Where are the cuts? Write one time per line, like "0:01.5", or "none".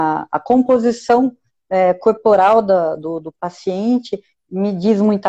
none